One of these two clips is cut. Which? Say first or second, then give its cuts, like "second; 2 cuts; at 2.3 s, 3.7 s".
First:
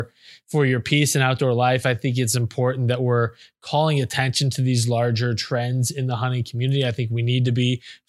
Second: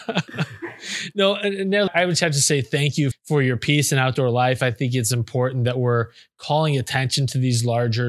second; 2 cuts; at 1.9 s, 3.1 s